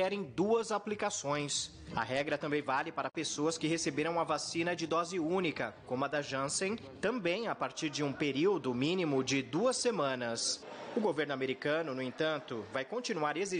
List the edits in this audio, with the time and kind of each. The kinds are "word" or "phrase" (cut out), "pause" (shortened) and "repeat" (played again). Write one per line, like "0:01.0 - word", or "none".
none

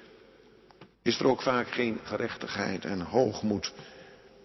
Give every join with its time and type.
0:00.9 - pause
0:02.0 - word

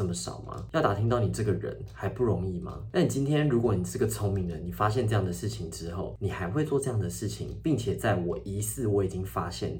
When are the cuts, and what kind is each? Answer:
none

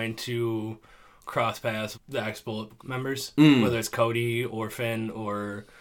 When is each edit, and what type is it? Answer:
0:01.9 - word
0:02.8 - word

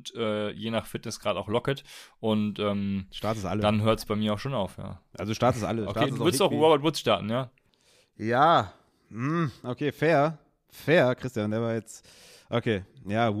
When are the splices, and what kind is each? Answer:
none

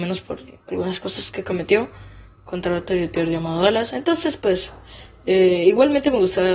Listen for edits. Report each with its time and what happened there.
none

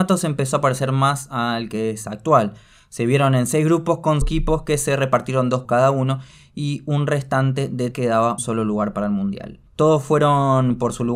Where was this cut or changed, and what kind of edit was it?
0:04.2 - word
0:05.6 - word
0:07.9 - word
0:08.4 - word
0:09.7 - pause

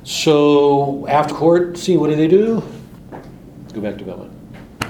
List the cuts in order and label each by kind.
0:01.3 - word

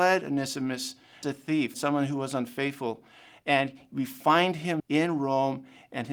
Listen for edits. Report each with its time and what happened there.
0:01.2 - word
0:01.7 - word
0:04.8 - word

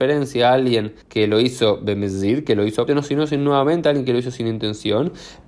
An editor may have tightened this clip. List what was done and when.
0:01.0 - pause
0:02.9 - word

